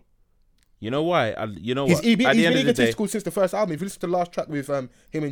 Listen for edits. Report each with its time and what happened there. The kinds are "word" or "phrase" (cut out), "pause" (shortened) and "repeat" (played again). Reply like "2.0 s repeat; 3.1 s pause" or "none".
none